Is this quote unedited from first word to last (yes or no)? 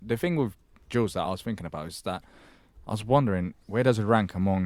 yes